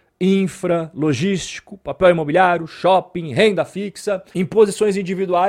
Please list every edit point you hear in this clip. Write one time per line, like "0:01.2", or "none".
none